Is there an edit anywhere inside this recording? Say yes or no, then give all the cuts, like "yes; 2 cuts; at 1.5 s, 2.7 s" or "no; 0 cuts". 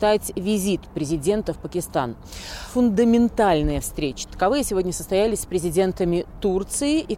no; 0 cuts